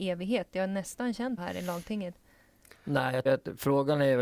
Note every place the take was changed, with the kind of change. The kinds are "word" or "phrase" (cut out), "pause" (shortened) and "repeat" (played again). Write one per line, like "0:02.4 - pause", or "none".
0:01.4 - word
0:03.3 - word

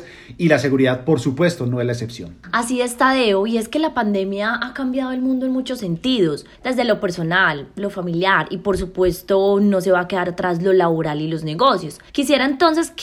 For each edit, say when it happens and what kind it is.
0:06.5 - pause
0:12.1 - pause

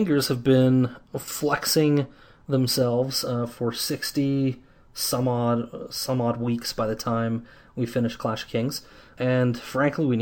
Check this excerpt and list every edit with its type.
none

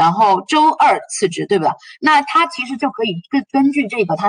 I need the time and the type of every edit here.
none

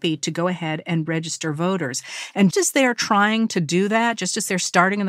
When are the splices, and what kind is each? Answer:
0:02.5 - word

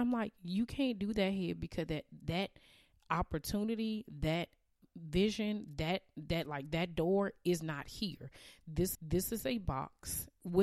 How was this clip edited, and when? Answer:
0:08.9 - repeat

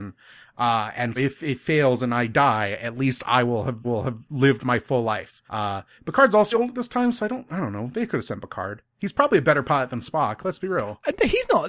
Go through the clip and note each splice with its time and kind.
0:01.2 - word
0:03.8 - repeat
0:05.5 - pause
0:06.5 - word

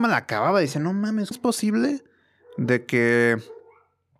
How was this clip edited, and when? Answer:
0:01.3 - word

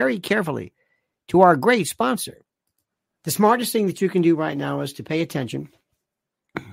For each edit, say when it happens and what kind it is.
none

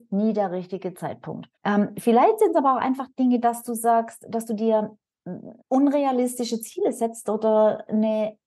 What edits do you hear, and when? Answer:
0:01.6 - pause
0:05.6 - pause

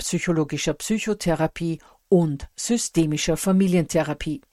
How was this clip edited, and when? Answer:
none

